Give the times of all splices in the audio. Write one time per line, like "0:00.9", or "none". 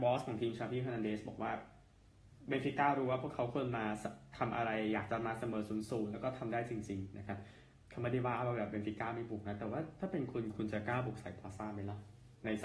none